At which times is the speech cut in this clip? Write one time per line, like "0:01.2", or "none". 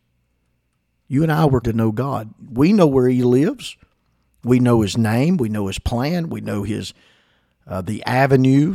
0:01.6

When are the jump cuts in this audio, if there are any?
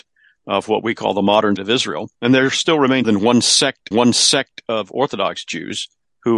0:01.6
0:03.0
0:03.9

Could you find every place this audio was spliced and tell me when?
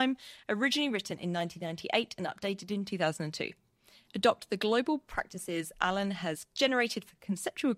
none

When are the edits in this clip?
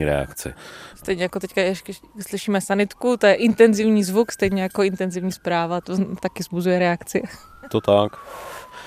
0:05.8
0:06.2
0:07.7

